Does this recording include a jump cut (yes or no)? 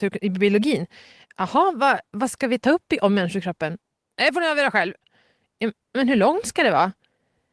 no